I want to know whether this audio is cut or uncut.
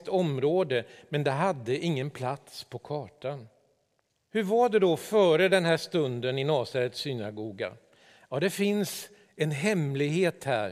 cut